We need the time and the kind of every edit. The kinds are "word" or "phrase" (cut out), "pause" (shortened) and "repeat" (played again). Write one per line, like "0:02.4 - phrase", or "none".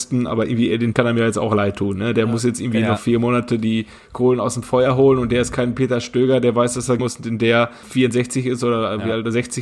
0:00.9 - word
0:07.0 - word
0:07.8 - word